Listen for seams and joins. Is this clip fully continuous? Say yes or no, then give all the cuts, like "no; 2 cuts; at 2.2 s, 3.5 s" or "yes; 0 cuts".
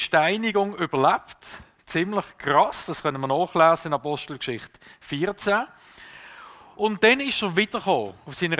yes; 0 cuts